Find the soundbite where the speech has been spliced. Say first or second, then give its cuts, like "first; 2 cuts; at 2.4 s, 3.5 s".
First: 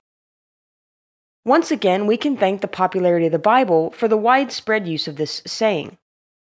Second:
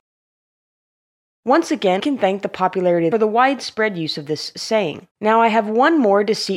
second; 3 cuts; at 2.0 s, 3.1 s, 5.1 s